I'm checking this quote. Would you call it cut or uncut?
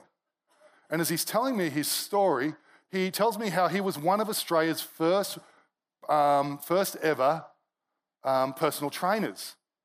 uncut